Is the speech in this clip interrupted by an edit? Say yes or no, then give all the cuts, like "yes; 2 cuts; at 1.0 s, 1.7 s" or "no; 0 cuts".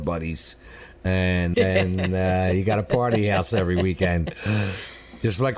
yes; 1 cut; at 1.5 s